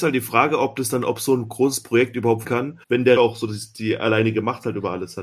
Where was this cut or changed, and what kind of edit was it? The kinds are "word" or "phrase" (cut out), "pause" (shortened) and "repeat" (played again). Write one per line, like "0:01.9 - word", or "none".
0:02.4 - word
0:02.8 - pause
0:03.2 - word